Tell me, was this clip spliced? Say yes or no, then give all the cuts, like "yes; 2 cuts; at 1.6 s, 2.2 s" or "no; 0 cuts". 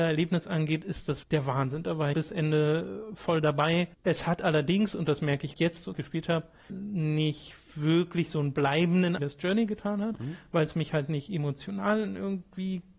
yes; 7 cuts; at 1.2 s, 2.1 s, 3.9 s, 5.5 s, 5.9 s, 6.7 s, 9.2 s